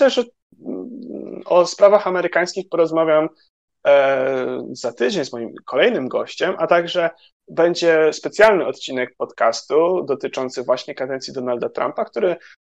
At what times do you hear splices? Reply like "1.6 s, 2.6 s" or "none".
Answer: none